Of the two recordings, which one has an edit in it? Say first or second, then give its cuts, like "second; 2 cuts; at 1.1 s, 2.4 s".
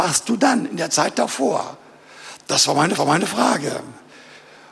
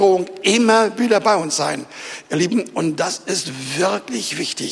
first; 1 cut; at 3.0 s